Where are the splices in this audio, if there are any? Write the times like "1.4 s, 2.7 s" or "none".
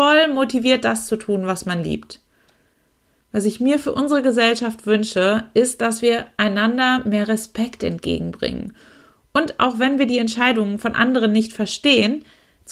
none